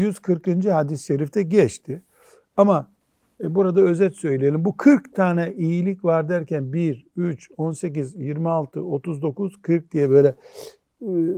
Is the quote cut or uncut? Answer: uncut